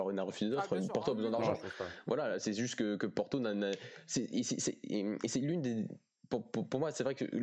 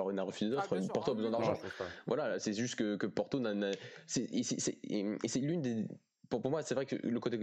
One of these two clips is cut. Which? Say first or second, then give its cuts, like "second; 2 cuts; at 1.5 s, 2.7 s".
second; 1 cut; at 6.4 s